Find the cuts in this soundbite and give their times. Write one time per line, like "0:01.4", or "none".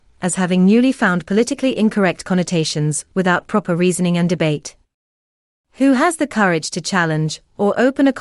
none